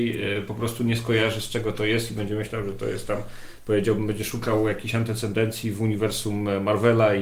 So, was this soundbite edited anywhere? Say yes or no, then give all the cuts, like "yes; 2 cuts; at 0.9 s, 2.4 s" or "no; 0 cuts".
no; 0 cuts